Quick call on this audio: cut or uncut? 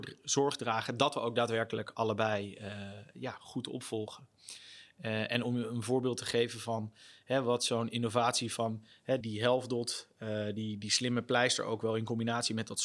cut